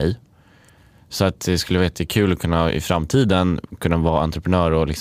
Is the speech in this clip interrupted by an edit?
no; 0 cuts

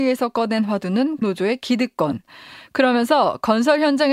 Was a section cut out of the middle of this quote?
yes; 1 cut; at 1.2 s

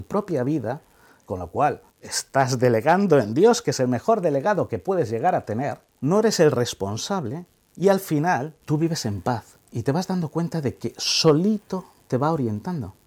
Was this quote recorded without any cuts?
no; 3 cuts; at 1.9 s, 5.9 s, 8.6 s

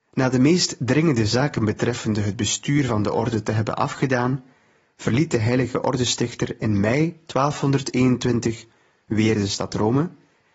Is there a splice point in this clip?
no; 0 cuts

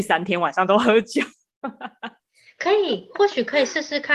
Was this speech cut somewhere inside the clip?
no; 0 cuts

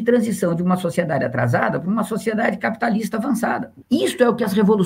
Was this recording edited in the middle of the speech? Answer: yes; 1 cut; at 3.8 s

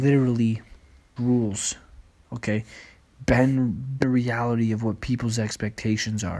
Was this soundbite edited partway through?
yes; 2 cuts; at 1.2 s, 4.0 s

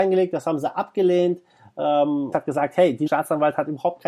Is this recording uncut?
no; 2 cuts; at 2.3 s, 3.1 s

